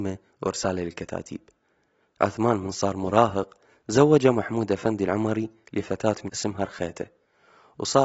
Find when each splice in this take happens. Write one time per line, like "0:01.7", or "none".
0:06.3